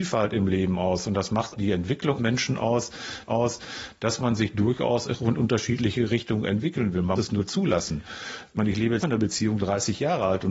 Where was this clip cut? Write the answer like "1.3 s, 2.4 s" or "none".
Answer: 1.5 s, 2.2 s, 3.3 s, 7.2 s, 9.0 s, 9.6 s